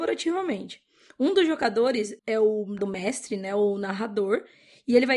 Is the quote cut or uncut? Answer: cut